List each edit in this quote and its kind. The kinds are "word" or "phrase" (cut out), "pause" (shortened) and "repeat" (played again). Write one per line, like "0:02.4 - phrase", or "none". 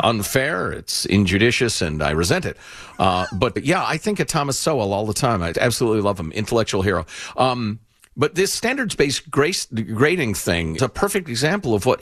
0:03.6 - word
0:05.5 - word
0:08.0 - pause
0:10.8 - word